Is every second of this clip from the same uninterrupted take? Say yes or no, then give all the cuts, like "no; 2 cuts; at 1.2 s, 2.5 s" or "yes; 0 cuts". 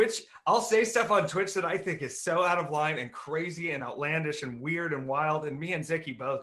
yes; 0 cuts